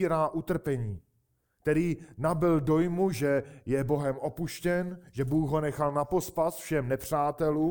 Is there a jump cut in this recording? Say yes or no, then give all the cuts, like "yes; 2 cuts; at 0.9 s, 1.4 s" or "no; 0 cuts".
no; 0 cuts